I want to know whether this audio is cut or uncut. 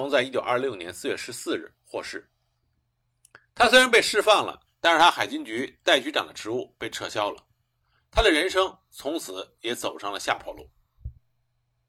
uncut